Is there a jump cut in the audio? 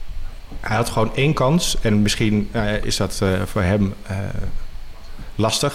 no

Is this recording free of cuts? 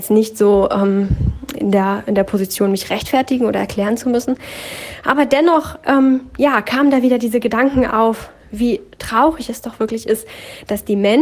yes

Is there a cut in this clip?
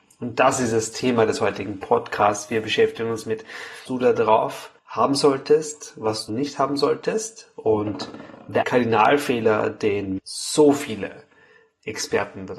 yes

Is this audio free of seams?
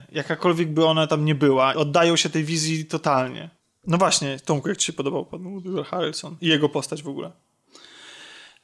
no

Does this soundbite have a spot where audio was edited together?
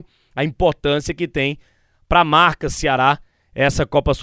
no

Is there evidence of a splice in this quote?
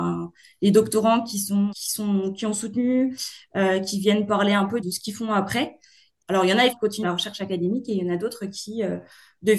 yes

